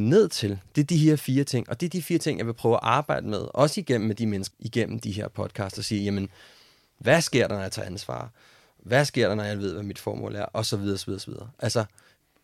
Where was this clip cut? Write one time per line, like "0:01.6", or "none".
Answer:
0:04.5